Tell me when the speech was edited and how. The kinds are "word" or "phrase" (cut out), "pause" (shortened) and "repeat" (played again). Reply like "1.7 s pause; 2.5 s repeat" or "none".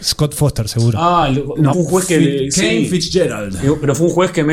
1.7 s phrase